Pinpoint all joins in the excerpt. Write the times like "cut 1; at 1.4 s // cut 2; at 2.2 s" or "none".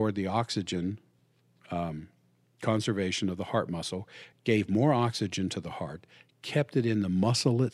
none